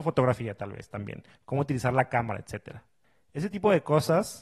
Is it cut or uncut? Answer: uncut